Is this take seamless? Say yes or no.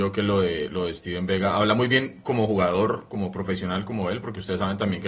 yes